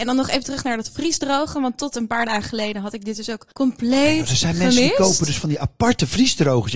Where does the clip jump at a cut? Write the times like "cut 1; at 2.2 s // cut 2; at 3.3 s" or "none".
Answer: cut 1; at 3.5 s